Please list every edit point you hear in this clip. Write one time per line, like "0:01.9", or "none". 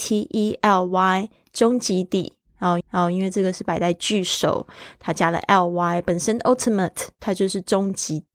0:02.8